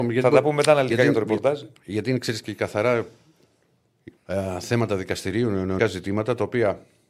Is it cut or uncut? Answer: cut